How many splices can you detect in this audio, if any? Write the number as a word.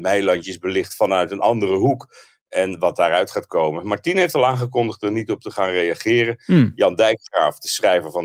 zero